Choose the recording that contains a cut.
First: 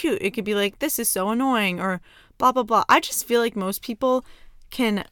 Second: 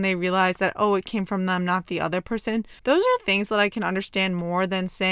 second; 2 cuts; at 2.8 s, 3.2 s

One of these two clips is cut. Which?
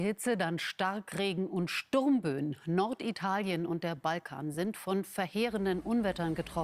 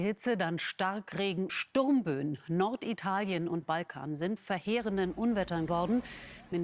second; 4 cuts; at 1.5 s, 3.6 s, 4.4 s, 5.7 s

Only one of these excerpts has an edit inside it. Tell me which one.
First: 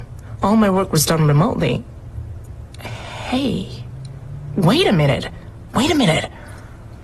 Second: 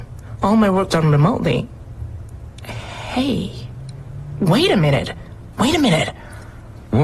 second; 1 cut; at 0.9 s

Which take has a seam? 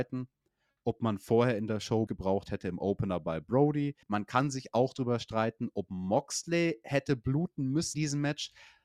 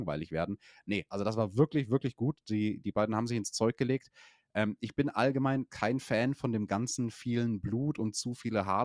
first; 3 cuts; at 2.1 s, 4.0 s, 7.9 s

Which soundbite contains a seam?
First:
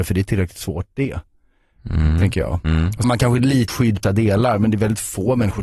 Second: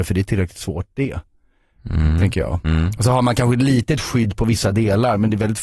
first; 3 cuts; at 3.0 s, 3.7 s, 4.0 s

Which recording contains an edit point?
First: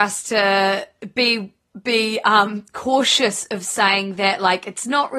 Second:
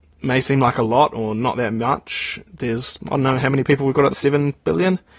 second; 1 cut; at 4.1 s

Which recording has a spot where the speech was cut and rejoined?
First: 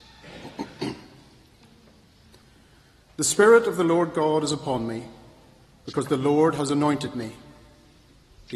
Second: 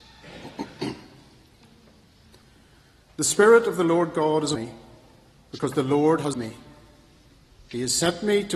second; 2 cuts; at 4.6 s, 6.3 s

